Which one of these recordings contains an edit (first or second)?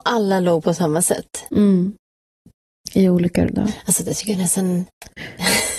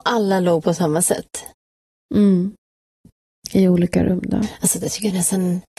first